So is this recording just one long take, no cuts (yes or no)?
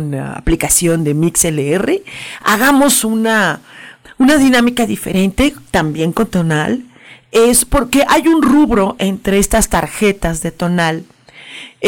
yes